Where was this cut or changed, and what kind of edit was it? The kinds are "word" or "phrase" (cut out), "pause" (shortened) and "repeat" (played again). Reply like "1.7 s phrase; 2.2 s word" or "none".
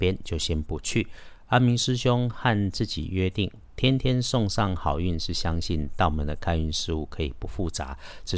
none